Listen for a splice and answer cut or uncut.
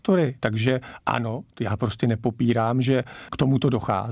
uncut